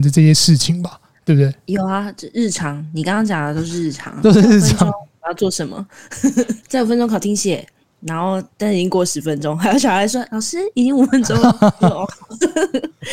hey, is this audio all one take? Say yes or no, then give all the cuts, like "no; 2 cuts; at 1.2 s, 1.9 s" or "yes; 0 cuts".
no; 1 cut; at 6.6 s